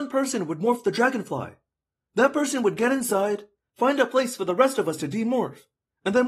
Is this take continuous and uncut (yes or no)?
yes